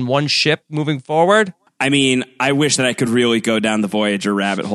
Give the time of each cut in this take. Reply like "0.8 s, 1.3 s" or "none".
none